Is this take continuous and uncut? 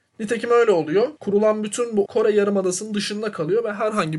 no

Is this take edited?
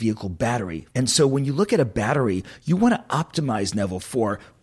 no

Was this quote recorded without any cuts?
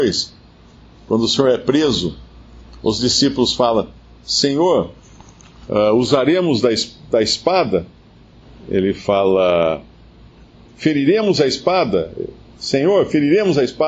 yes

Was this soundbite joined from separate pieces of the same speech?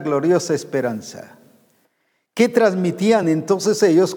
no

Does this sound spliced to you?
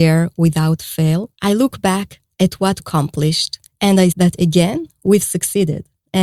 yes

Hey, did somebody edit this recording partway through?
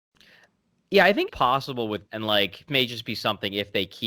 yes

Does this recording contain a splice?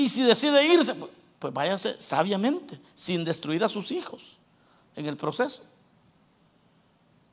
no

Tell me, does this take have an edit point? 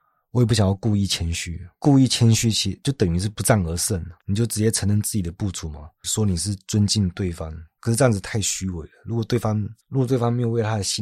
yes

